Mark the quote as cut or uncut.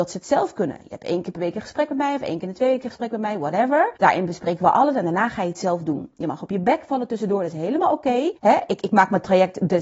cut